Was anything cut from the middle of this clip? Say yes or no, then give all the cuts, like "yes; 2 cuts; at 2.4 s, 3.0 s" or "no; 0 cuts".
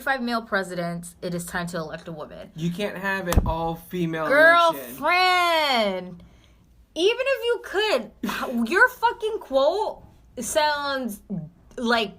no; 0 cuts